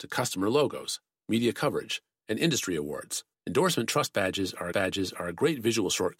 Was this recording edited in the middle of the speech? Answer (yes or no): yes